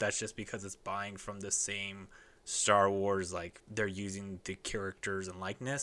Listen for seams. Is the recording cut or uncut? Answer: uncut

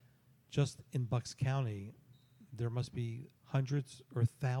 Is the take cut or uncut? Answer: cut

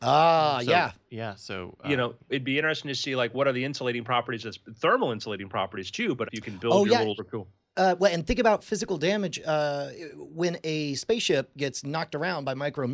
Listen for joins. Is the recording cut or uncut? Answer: cut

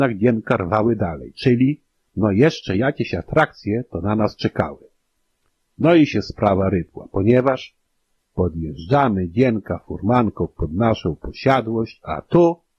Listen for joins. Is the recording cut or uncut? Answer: uncut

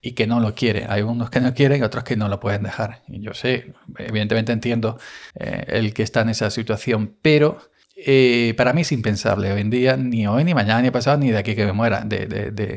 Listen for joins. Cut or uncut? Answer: cut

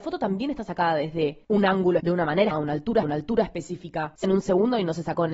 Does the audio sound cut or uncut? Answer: cut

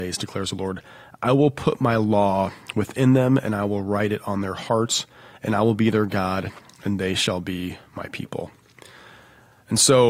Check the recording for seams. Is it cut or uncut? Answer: uncut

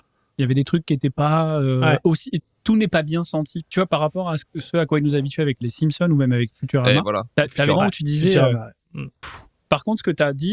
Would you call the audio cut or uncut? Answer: cut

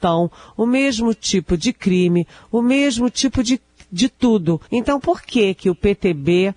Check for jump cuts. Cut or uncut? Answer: cut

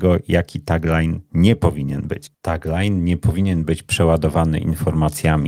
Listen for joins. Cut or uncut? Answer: cut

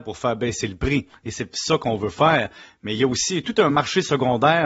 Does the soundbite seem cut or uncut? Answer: uncut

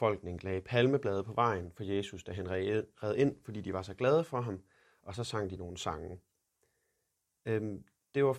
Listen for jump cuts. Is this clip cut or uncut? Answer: uncut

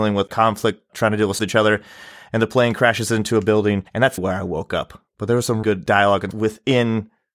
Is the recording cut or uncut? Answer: cut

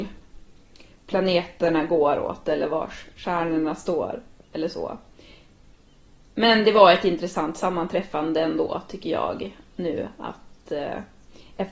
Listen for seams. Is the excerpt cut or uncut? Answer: uncut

